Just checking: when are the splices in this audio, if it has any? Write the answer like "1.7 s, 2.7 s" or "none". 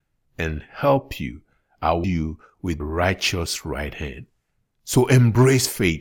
2.0 s, 2.8 s

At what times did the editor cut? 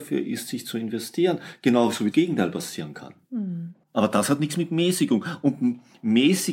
2.1 s, 3.8 s

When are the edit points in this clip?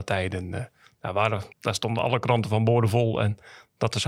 1.5 s

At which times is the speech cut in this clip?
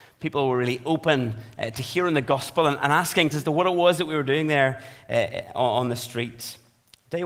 3.3 s

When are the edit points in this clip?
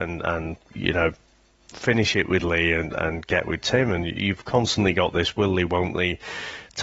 none

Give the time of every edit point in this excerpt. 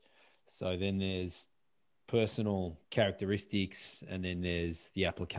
2.8 s

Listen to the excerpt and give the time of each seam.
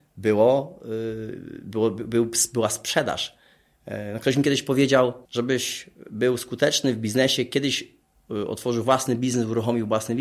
5.2 s

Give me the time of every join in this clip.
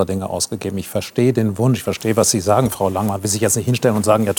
none

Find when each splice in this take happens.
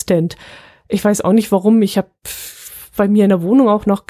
none

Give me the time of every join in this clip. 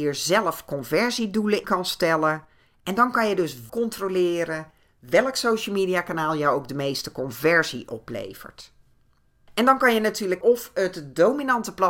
1.6 s, 3.7 s, 10.4 s

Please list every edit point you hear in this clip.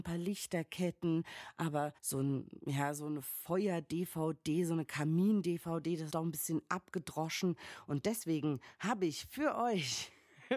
2.0 s, 6.1 s

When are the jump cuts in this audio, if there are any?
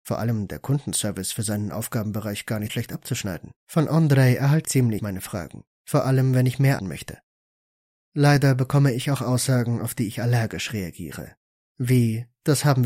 2.7 s, 3.6 s, 4.6 s, 5.0 s, 5.7 s, 6.8 s

